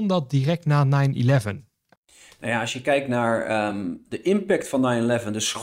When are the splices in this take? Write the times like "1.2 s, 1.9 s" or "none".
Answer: none